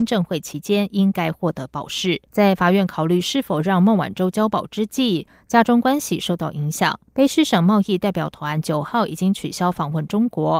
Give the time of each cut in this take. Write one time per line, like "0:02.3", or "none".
0:02.3
0:07.1